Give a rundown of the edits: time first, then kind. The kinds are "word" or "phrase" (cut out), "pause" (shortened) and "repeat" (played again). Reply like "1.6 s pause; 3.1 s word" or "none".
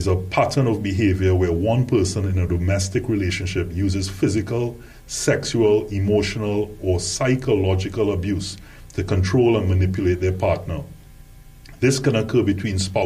none